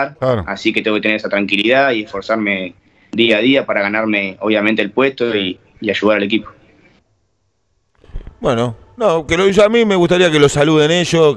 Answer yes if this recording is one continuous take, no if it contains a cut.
yes